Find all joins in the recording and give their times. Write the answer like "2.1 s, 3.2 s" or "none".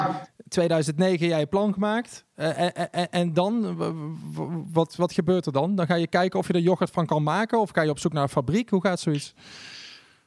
none